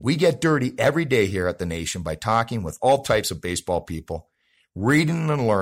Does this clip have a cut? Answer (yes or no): no